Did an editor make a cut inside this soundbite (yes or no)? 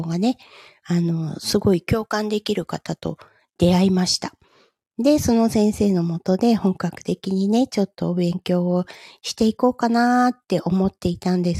no